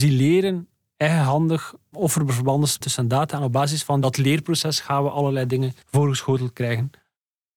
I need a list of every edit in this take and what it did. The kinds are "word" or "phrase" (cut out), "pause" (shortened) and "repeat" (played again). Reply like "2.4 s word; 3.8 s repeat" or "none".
2.8 s word; 5.8 s pause